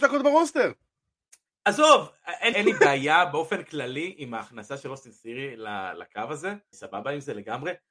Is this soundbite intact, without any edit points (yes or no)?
no